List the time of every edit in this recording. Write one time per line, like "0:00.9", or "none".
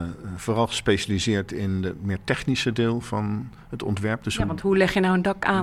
none